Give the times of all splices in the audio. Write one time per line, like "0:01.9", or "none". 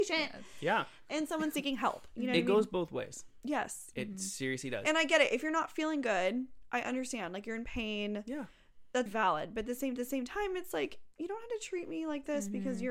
0:09.1
0:10.0